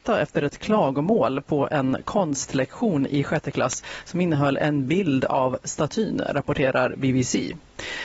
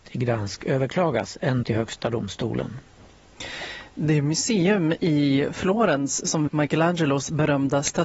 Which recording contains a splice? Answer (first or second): second